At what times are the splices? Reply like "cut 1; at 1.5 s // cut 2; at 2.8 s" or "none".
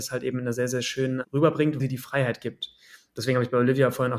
cut 1; at 1.2 s // cut 2; at 1.8 s